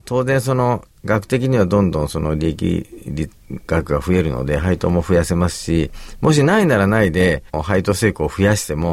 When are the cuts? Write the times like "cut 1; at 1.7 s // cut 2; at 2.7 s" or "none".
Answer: cut 1; at 7.5 s